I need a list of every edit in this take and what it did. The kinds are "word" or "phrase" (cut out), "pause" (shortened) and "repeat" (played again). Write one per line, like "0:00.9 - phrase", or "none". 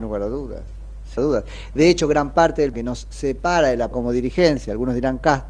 0:01.2 - phrase
0:02.7 - word
0:03.9 - word